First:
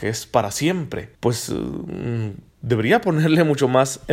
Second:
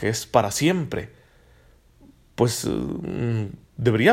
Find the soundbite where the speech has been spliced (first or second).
first